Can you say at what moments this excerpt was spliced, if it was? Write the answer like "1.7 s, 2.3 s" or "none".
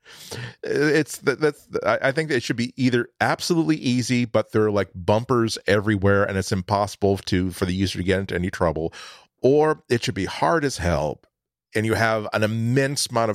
none